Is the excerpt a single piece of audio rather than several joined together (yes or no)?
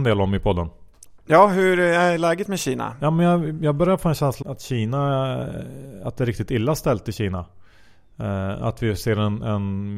no